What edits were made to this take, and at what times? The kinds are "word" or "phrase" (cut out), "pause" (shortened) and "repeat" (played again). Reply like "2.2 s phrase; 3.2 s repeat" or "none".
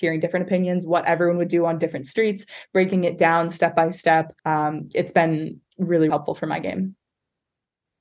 4.4 s pause; 6.1 s word